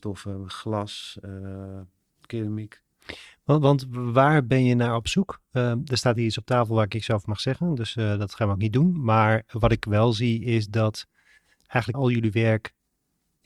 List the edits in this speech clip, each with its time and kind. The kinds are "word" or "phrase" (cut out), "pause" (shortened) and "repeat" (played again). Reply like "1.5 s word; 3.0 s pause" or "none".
11.9 s word